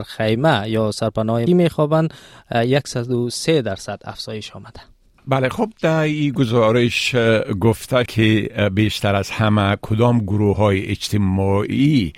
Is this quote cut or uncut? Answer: cut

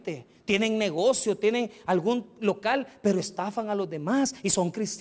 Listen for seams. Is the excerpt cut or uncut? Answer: uncut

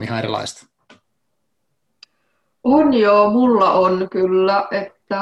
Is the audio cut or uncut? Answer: uncut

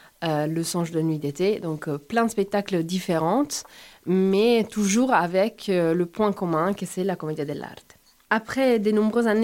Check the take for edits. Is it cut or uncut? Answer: uncut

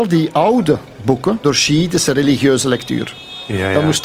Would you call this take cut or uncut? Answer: cut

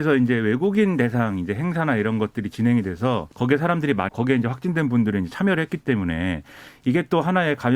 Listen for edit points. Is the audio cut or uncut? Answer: cut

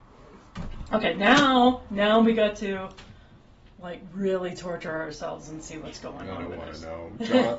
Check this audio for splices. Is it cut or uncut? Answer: uncut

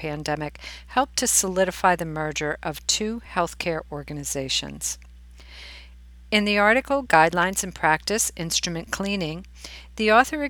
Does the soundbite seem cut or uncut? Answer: uncut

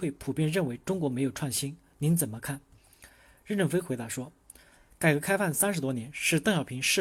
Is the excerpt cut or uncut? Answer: uncut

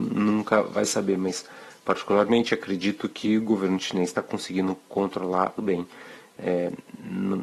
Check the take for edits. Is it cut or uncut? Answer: cut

